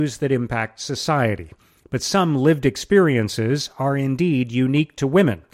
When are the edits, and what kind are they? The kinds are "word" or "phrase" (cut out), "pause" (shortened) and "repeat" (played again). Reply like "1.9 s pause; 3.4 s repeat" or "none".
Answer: none